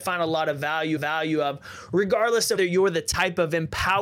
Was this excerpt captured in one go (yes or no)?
no